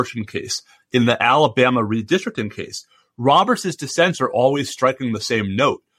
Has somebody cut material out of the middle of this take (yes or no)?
no